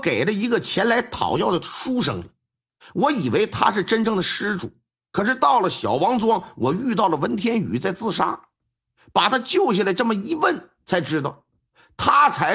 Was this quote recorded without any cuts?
yes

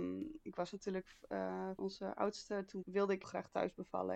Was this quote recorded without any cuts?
no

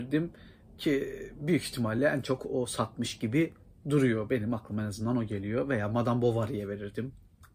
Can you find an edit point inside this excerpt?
no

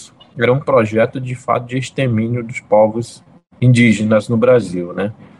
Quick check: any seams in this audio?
no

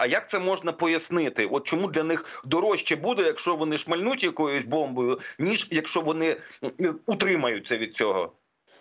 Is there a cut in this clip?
no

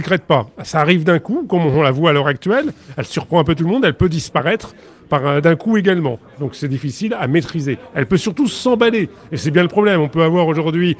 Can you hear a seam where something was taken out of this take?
no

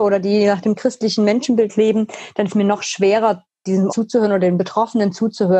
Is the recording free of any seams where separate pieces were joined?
no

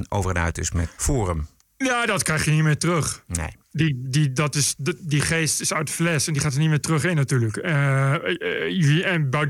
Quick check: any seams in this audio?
yes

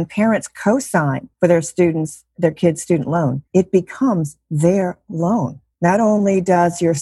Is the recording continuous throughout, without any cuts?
no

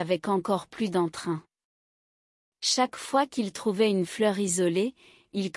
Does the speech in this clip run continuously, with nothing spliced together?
yes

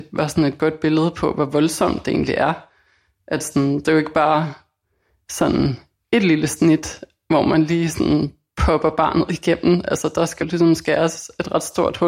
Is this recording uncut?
no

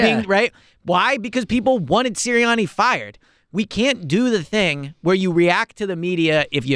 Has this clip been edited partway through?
no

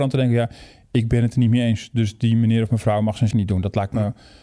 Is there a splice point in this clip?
yes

